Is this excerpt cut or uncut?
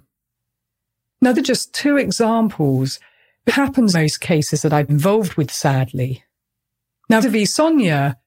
cut